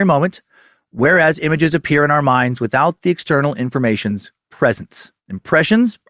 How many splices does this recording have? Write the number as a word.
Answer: one